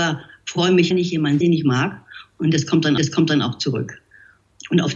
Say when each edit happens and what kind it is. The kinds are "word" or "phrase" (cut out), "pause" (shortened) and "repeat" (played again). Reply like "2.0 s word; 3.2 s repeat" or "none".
0.9 s phrase; 1.4 s word; 3.0 s repeat